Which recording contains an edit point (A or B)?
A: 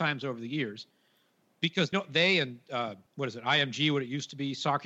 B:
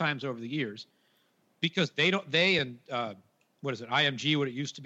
A